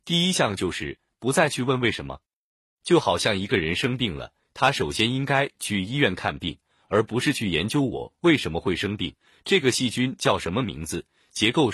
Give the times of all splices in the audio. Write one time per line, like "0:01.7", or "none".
none